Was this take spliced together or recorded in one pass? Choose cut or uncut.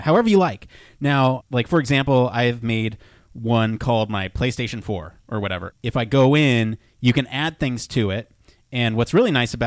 cut